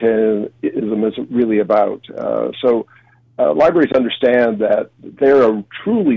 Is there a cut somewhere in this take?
no; 0 cuts

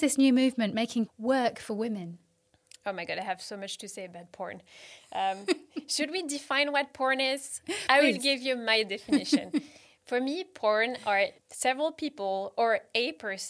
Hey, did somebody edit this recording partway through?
yes; 1 cut; at 1.1 s

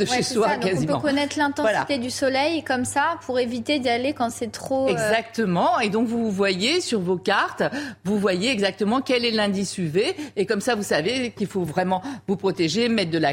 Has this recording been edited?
no; 0 cuts

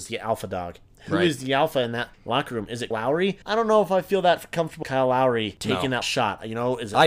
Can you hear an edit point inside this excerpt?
yes; 5 cuts; at 2.1 s, 2.9 s, 3.4 s, 4.8 s, 6.0 s

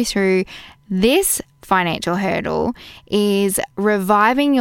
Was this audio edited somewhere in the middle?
no; 0 cuts

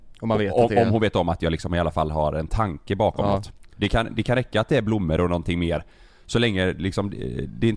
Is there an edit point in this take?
no; 0 cuts

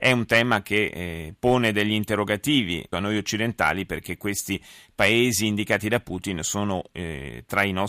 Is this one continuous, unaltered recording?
no; 1 cut; at 2.9 s

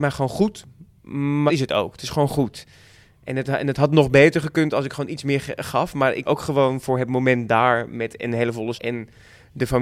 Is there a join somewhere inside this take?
yes; 3 cuts; at 1.5 s, 6.2 s, 8.7 s

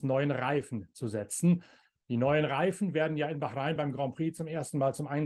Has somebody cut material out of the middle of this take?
no; 0 cuts

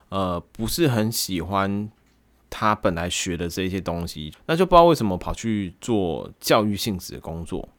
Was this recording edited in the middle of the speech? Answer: no; 0 cuts

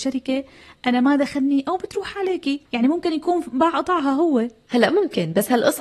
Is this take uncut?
no; 1 cut; at 2.6 s

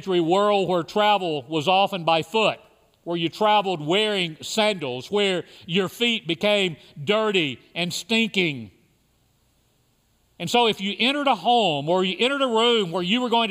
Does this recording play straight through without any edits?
yes; 0 cuts

